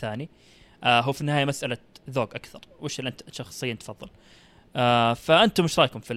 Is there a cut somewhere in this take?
no; 0 cuts

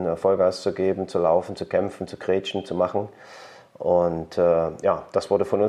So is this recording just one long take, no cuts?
yes; 0 cuts

